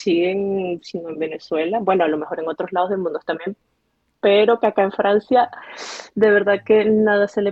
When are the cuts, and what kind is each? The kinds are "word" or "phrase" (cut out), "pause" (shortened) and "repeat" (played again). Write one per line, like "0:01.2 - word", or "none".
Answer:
none